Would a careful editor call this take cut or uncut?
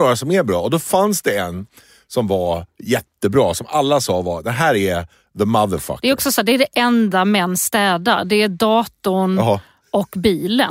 uncut